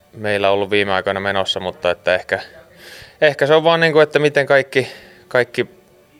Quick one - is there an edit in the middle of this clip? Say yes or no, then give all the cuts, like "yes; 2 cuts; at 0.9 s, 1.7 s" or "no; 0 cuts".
no; 0 cuts